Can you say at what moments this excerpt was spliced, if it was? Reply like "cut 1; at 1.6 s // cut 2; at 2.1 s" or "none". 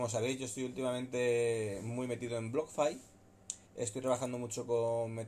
cut 1; at 3.6 s